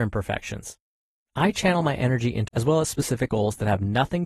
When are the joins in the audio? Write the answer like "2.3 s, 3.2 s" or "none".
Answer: 2.5 s, 3.3 s